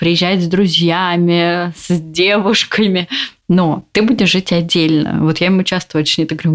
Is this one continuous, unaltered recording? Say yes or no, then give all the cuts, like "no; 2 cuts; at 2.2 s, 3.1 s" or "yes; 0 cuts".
yes; 0 cuts